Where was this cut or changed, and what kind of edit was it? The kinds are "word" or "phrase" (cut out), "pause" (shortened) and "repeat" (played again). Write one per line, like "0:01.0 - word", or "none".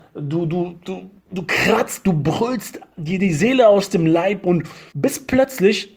0:01.2 - pause
0:02.9 - pause
0:04.9 - pause